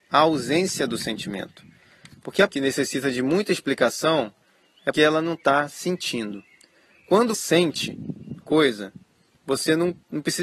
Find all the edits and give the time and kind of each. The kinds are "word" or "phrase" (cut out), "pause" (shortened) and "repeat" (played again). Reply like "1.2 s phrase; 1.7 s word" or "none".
2.5 s word; 4.9 s word; 7.3 s word; 8.4 s word

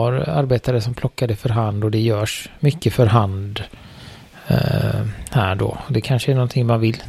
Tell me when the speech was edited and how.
none

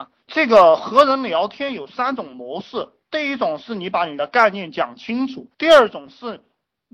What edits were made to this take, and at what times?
5.5 s pause

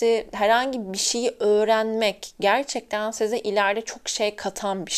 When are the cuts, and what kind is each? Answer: none

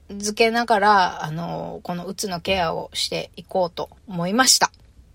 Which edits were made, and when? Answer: 4.0 s pause

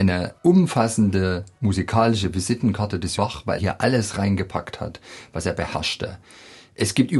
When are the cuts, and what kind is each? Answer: 3.2 s word; 3.6 s word

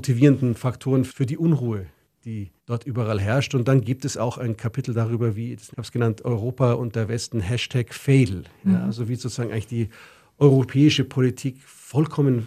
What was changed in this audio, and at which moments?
2.6 s pause; 5.7 s phrase

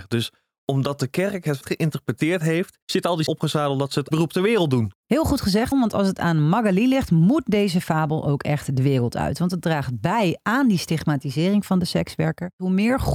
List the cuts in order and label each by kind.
1.6 s word; 2.8 s pause; 3.3 s phrase; 4.1 s word; 5.7 s word

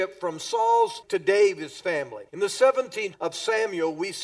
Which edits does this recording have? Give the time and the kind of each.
1.0 s word; 2.3 s pause; 3.1 s word

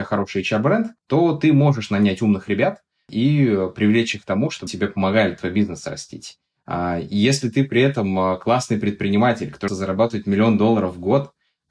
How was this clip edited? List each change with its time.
4.7 s word; 9.7 s word

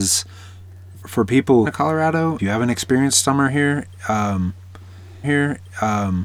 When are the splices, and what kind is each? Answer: 1.0 s word; 1.6 s phrase; 2.4 s word; 5.2 s repeat

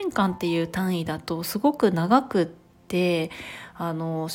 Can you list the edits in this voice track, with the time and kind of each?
none

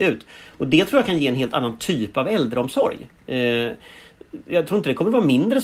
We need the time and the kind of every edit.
none

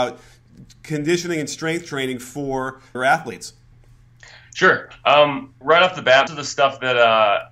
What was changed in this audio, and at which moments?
2.9 s word; 5.6 s word; 6.3 s word

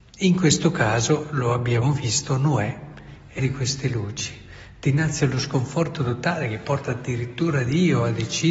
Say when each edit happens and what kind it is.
3.4 s word

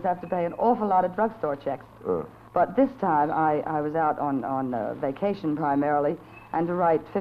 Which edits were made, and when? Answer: none

